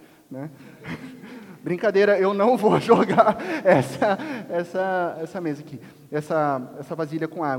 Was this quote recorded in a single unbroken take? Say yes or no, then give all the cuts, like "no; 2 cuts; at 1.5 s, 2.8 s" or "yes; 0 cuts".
yes; 0 cuts